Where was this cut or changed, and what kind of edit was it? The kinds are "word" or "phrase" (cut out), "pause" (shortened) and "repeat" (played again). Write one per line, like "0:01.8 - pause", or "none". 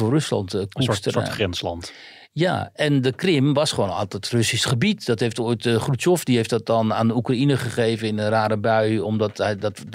none